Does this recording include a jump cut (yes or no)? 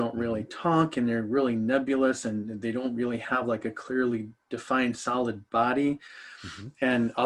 no